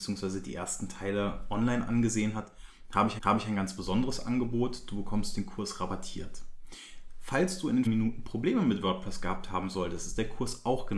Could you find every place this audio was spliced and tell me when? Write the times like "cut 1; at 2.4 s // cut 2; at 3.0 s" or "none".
cut 1; at 3.2 s // cut 2; at 7.9 s